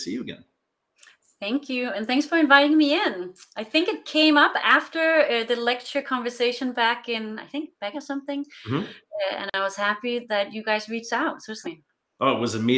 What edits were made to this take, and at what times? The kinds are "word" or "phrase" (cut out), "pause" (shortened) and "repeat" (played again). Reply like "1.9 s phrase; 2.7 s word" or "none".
7.9 s phrase; 11.6 s phrase